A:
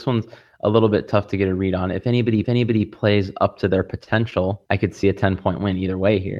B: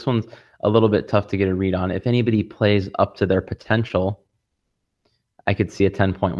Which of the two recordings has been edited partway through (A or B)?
A